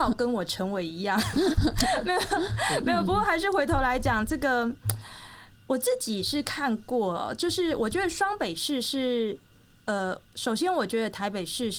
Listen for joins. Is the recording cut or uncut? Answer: cut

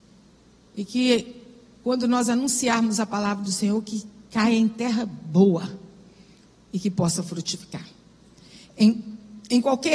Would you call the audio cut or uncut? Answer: uncut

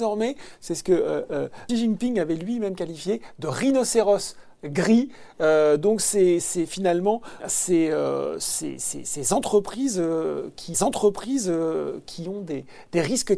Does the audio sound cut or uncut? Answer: cut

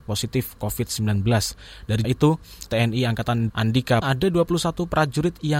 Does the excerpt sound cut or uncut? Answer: cut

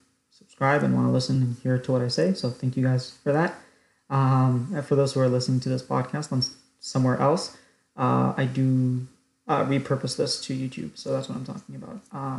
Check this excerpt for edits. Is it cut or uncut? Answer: uncut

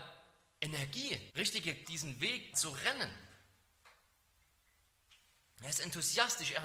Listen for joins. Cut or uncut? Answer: cut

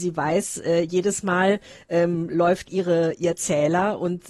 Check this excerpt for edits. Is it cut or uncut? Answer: uncut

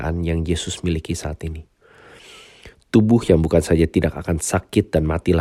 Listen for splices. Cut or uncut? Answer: uncut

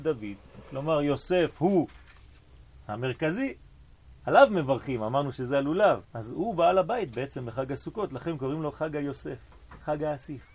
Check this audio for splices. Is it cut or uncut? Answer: cut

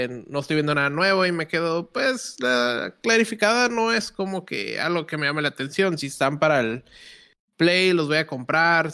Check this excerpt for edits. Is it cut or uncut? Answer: uncut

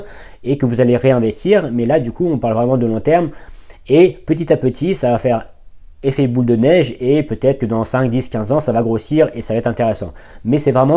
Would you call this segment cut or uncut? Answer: uncut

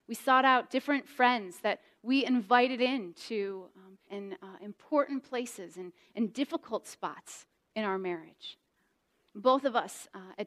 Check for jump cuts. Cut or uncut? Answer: cut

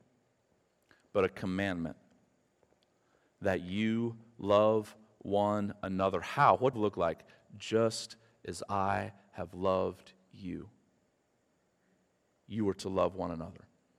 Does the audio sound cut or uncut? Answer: cut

